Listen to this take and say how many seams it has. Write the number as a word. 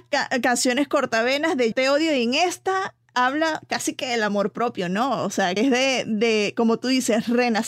two